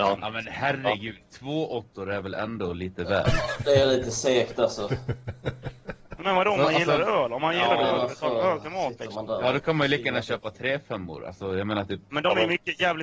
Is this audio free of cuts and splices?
yes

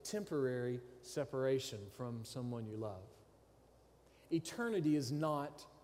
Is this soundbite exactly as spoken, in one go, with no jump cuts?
yes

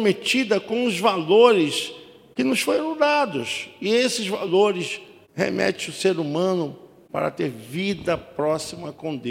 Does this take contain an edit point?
no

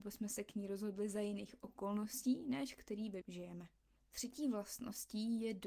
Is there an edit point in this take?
yes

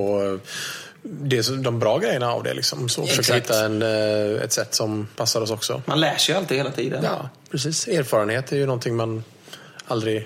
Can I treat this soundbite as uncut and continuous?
no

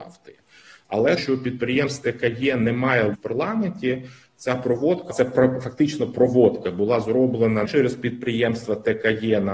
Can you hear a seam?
yes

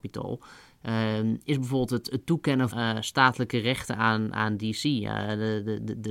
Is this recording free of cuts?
no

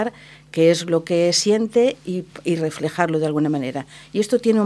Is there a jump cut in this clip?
no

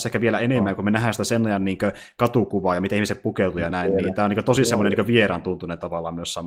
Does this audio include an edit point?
no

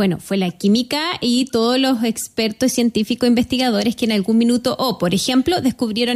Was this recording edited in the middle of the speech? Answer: no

